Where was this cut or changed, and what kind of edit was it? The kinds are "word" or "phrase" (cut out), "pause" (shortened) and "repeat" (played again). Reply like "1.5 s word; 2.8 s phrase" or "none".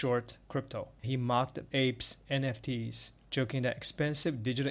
1.0 s word; 1.7 s word